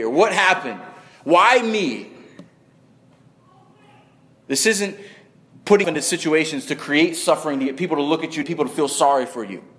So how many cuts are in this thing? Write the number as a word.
two